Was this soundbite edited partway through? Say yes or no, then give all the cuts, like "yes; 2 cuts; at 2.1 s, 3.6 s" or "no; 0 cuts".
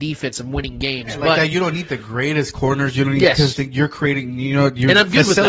no; 0 cuts